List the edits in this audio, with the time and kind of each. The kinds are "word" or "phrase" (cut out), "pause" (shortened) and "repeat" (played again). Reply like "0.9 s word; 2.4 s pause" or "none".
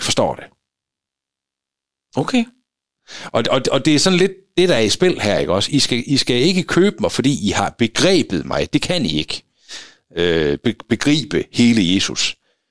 none